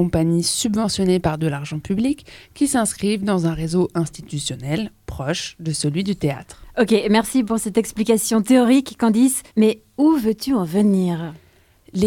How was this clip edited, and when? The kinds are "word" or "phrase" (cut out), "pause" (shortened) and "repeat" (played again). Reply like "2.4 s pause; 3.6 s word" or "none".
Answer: 9.5 s pause